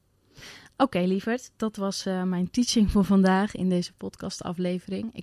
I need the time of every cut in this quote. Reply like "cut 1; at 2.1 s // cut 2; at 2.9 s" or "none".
none